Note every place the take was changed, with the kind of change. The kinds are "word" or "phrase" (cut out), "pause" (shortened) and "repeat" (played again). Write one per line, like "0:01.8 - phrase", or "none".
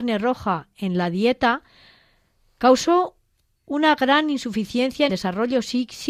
0:05.1 - word